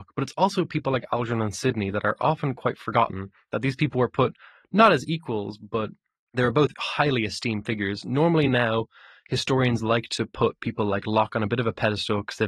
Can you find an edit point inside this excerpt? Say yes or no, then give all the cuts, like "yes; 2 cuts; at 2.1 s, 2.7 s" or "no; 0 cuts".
no; 0 cuts